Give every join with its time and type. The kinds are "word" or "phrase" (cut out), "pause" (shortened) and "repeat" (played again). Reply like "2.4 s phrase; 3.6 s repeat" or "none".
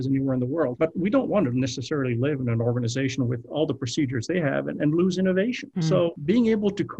none